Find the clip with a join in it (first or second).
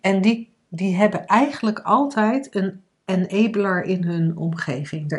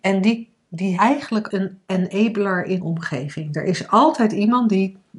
second